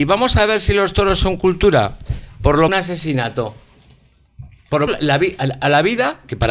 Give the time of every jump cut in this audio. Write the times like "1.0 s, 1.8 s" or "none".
2.7 s, 4.9 s